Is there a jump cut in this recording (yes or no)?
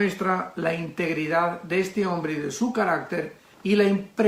no